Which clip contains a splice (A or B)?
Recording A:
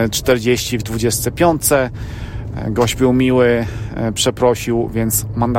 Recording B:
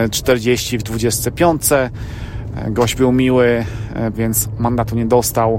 B